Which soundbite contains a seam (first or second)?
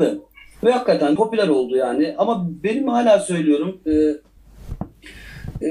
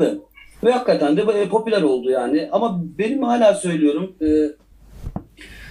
first